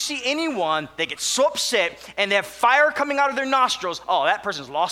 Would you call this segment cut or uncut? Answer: uncut